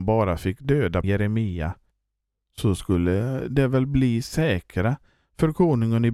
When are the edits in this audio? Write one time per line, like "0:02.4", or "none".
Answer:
0:01.0